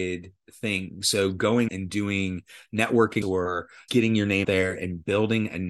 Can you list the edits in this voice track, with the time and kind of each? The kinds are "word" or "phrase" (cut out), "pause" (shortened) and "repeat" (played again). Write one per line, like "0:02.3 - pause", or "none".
0:01.7 - word
0:03.2 - word
0:03.9 - word
0:04.4 - word